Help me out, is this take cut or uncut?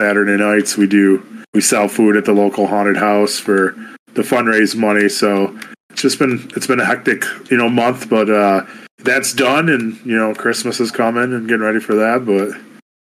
cut